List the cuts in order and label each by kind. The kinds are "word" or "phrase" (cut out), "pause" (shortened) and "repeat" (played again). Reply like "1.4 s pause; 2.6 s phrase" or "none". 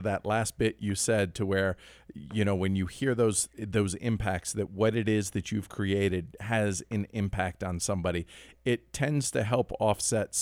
none